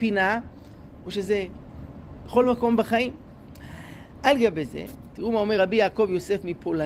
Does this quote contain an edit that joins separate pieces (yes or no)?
no